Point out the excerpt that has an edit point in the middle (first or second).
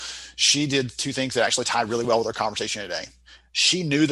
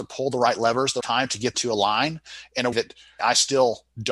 second